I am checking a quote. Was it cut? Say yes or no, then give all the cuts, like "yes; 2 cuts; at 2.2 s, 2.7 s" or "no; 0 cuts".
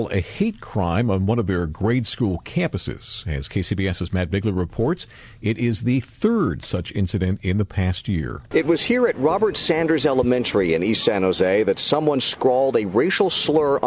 no; 0 cuts